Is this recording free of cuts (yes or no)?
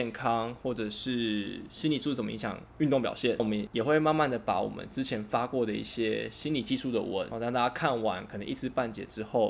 yes